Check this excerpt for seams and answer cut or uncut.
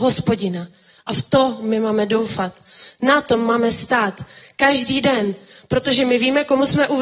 uncut